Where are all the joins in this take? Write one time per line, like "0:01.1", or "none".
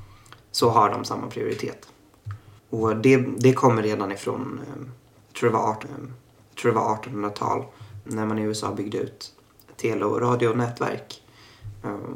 0:02.6
0:05.8
0:08.1